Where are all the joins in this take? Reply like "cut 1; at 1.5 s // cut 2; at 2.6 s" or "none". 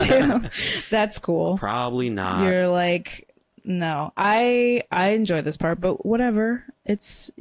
none